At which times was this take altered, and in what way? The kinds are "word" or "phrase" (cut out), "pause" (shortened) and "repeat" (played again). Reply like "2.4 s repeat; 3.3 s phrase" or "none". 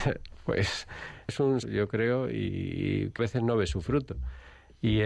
1.3 s phrase; 1.6 s word; 3.2 s word

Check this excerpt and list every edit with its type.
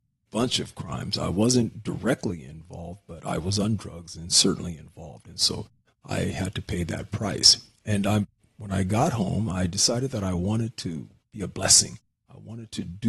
none

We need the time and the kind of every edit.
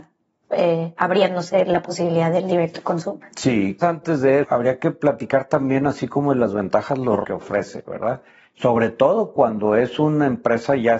3.8 s word; 4.4 s word; 7.2 s word

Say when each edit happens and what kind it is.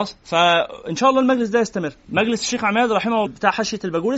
2.0 s pause; 3.3 s word

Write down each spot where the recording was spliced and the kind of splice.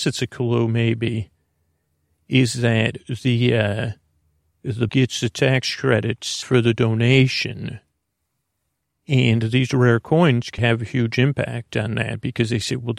4.9 s word; 6.4 s word; 10.6 s word

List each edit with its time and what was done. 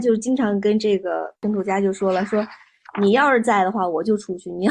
1.4 s pause

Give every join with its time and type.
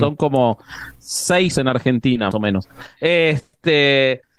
1.5 s word; 2.3 s word

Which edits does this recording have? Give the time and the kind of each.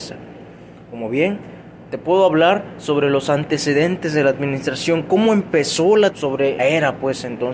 6.1 s word; 6.6 s word

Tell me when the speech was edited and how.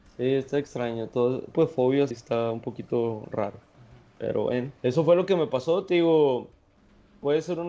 1.5 s phrase; 2.1 s word; 3.7 s pause; 4.8 s pause

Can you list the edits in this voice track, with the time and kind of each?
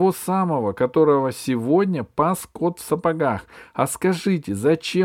none

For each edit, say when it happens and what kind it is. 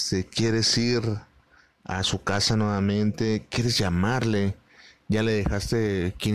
none

